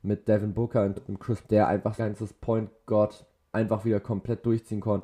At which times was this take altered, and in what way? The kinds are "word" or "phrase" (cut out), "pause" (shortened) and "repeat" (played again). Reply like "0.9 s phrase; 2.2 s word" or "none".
1.0 s word; 1.4 s word; 2.0 s word; 3.5 s word